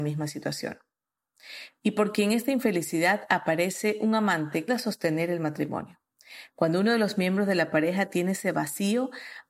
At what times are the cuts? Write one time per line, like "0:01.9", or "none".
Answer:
0:04.7